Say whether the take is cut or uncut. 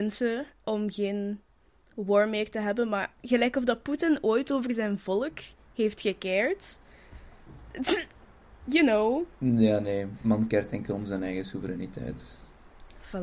uncut